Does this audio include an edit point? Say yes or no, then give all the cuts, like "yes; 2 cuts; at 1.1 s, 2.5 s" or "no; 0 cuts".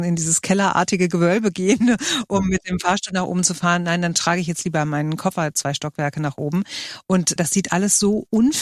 yes; 1 cut; at 7.4 s